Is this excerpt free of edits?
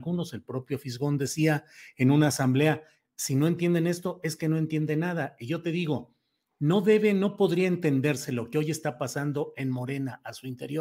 yes; 0 cuts

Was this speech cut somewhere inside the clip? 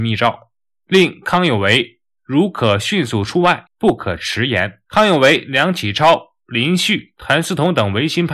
yes; 2 cuts; at 3.7 s, 4.8 s

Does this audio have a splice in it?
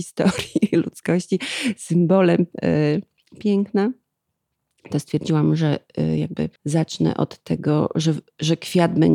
yes; 1 cut; at 6.6 s

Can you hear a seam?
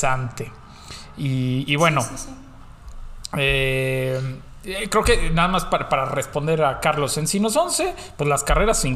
no; 0 cuts

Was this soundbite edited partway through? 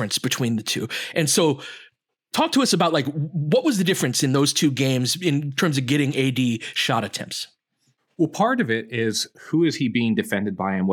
no; 0 cuts

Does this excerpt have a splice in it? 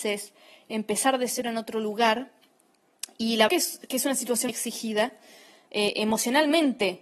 yes; 2 cuts; at 3.5 s, 4.5 s

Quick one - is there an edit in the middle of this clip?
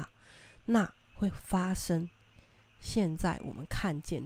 yes; 1 cut; at 1.0 s

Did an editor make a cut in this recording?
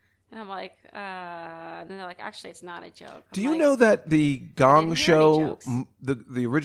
no; 0 cuts

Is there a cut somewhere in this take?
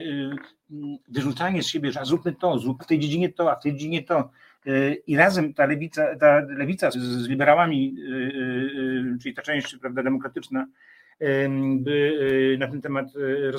yes; 3 cuts; at 2.8 s, 6.2 s, 6.9 s

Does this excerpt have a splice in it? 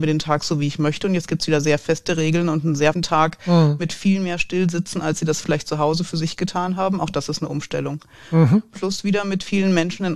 yes; 1 cut; at 2.9 s

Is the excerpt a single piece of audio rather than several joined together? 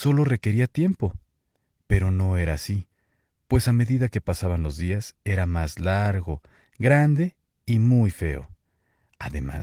yes; 0 cuts

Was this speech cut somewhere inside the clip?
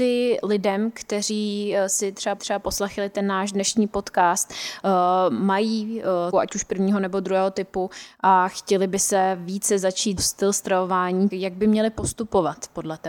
yes; 4 cuts; at 2.4 s, 6.3 s, 10.2 s, 11.3 s

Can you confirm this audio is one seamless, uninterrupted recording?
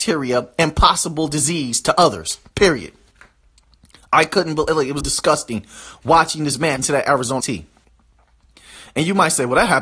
no; 3 cuts; at 5.0 s, 6.8 s, 7.4 s

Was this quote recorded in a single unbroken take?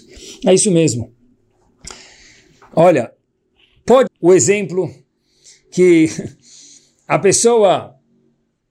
no; 1 cut; at 4.1 s

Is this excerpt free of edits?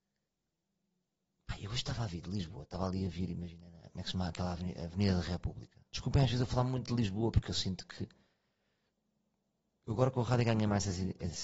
no; 1 cut; at 5.9 s

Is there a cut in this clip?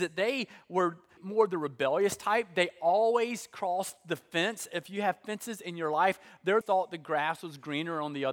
yes; 2 cuts; at 1.2 s, 6.6 s

